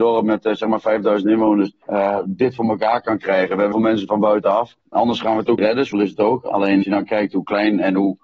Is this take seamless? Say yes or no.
no